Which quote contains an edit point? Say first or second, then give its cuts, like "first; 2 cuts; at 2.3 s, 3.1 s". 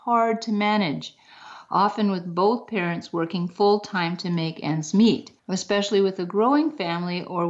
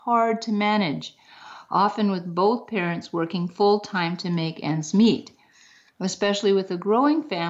first; 1 cut; at 5.4 s